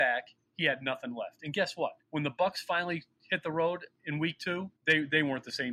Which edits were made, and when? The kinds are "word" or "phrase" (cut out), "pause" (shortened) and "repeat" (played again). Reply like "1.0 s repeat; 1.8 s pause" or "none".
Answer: 2.0 s pause; 4.8 s pause